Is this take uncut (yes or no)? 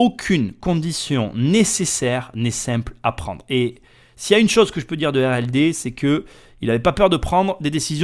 yes